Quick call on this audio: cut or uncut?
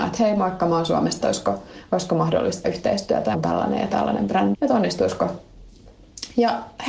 cut